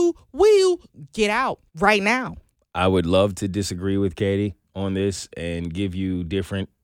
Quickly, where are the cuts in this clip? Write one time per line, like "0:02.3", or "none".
0:01.7
0:02.6